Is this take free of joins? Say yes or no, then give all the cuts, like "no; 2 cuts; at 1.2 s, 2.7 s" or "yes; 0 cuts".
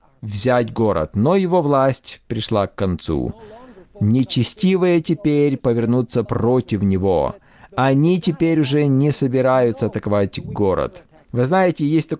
yes; 0 cuts